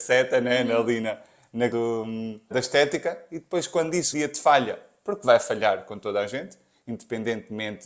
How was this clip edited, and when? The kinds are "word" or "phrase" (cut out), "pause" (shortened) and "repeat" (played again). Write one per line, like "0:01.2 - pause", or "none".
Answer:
0:01.7 - word
0:02.5 - word
0:04.1 - word